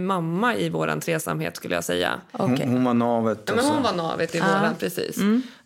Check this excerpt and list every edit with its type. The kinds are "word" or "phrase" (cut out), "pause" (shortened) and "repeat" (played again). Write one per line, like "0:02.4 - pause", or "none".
none